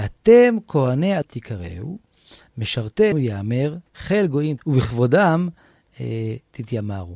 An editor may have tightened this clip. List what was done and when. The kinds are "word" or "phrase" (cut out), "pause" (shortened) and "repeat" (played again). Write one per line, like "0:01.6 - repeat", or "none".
0:01.2 - word
0:03.1 - word
0:03.9 - word
0:04.6 - word

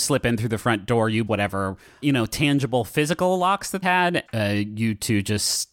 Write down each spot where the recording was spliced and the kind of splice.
0:01.3 - word
0:02.0 - word
0:03.8 - word
0:04.3 - word

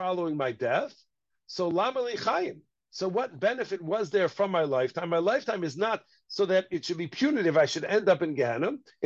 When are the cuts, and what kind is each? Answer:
none

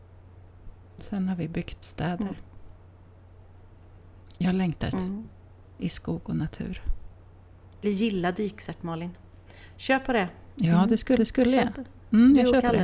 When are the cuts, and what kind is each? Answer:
0:04.9 - phrase
0:07.8 - word
0:11.2 - repeat

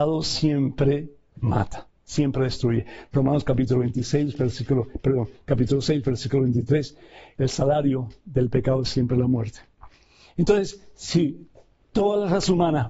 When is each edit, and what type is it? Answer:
none

